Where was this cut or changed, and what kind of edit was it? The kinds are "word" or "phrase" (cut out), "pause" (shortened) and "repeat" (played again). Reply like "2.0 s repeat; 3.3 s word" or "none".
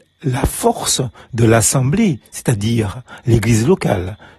none